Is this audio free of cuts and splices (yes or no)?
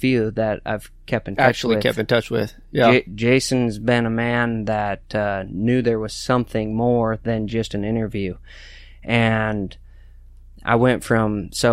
yes